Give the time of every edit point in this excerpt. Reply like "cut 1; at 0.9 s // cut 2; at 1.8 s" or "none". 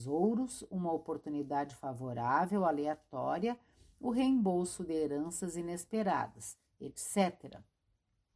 none